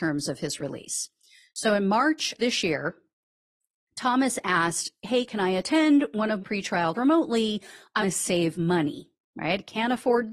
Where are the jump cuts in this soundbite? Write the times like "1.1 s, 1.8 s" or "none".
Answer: 2.4 s, 6.4 s, 6.9 s, 8.0 s